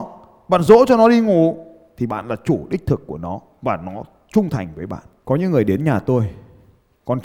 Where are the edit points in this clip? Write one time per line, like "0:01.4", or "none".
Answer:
none

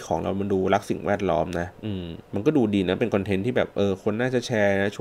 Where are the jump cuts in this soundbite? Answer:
0:01.7
0:02.2

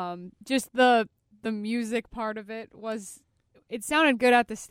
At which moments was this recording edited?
none

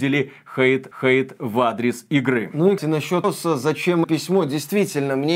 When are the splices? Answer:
0:00.9
0:02.8
0:03.2
0:04.0

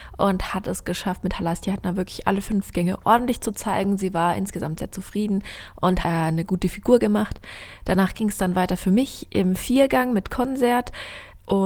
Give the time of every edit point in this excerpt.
0:06.0

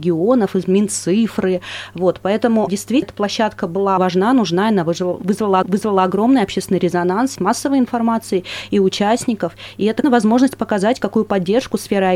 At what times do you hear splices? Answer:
0:02.7
0:03.0
0:04.0
0:05.6
0:07.4
0:10.0

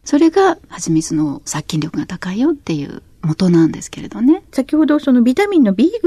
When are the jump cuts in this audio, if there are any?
0:04.5

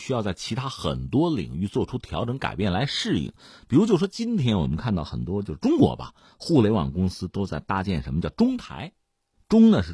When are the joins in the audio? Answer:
none

